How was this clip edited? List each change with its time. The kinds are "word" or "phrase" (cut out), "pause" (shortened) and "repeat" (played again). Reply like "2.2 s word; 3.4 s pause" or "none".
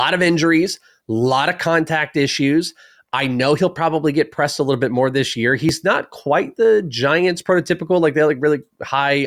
none